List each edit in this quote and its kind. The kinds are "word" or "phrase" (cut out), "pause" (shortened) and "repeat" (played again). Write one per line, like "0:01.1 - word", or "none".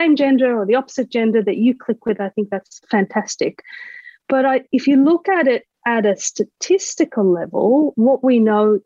none